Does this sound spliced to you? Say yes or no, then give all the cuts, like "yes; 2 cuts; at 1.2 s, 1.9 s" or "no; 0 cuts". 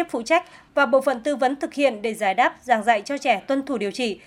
no; 0 cuts